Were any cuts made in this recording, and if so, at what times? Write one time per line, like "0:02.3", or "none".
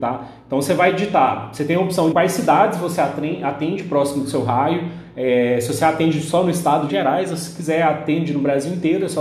0:02.1
0:06.9